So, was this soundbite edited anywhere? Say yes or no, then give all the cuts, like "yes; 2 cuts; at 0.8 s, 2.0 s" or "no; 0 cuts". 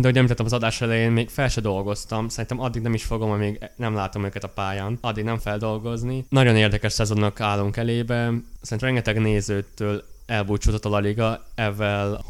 yes; 3 cuts; at 5.4 s, 6.3 s, 8.8 s